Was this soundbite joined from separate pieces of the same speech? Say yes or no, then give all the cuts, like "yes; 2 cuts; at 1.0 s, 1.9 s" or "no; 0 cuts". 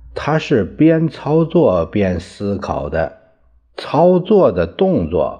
no; 0 cuts